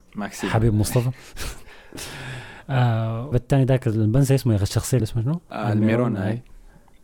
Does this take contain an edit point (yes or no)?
yes